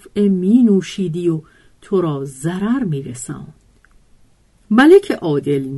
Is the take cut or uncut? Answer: uncut